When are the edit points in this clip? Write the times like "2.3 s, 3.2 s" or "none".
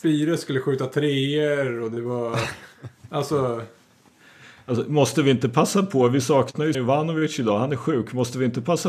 6.7 s